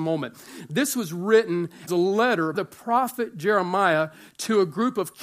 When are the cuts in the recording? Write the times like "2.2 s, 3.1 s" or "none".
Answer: 1.9 s, 2.5 s